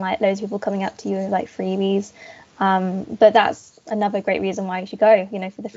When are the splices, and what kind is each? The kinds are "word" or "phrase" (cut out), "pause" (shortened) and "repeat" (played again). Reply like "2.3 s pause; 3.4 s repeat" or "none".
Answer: none